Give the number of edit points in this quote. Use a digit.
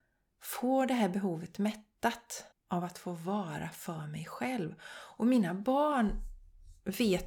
1